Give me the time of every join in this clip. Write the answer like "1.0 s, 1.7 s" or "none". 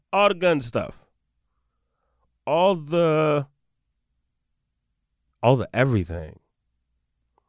none